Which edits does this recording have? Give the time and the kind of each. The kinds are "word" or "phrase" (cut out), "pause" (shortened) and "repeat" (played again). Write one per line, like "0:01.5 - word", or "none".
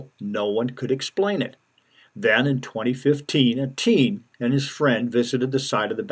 none

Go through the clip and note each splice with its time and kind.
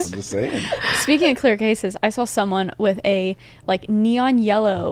none

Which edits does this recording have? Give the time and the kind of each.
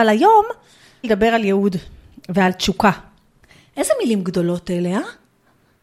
0:01.0 - phrase
0:03.4 - pause

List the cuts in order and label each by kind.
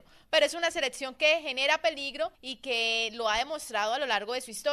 0:02.3 - pause

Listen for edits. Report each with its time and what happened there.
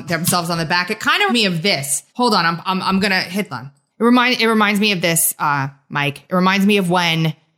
0:01.3 - word
0:02.1 - pause
0:03.5 - phrase
0:03.9 - pause

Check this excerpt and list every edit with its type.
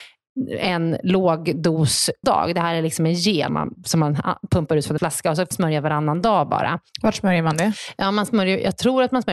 0:02.2 - word
0:03.5 - word
0:05.0 - word
0:05.5 - word
0:06.9 - pause

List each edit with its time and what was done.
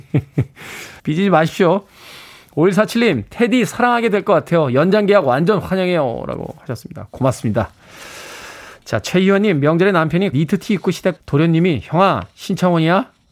0:01.0 - pause
0:10.3 - word
0:11.2 - word

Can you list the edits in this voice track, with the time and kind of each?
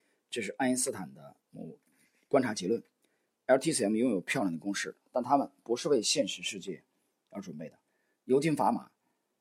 none

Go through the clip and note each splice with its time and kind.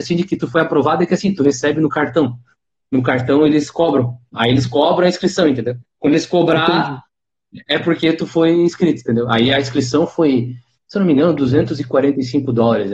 none

